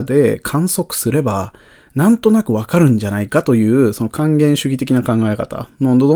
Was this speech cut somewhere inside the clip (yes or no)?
no